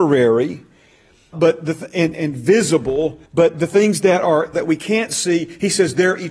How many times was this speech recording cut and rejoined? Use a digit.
4